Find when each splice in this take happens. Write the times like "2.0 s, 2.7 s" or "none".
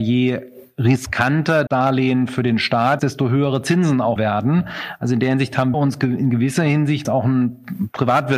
1.7 s, 3.0 s, 4.2 s, 5.7 s, 7.0 s